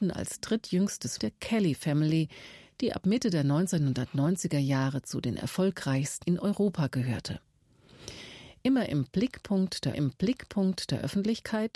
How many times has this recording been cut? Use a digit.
3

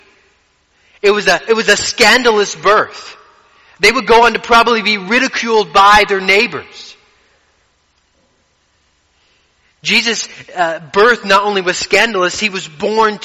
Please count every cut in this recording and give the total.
0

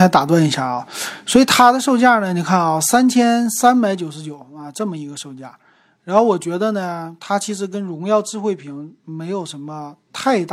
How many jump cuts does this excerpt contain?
0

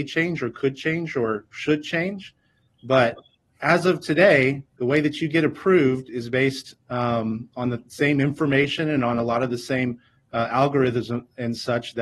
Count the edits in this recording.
1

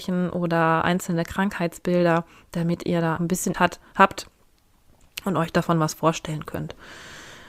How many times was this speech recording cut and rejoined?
2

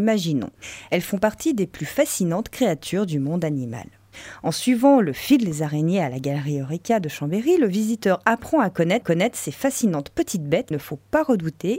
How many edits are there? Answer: 2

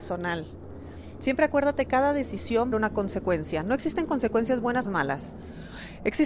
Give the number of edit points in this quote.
3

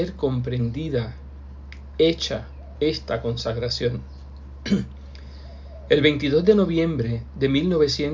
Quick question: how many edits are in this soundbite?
1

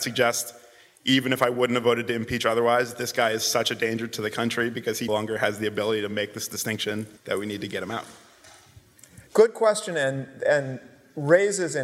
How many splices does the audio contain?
3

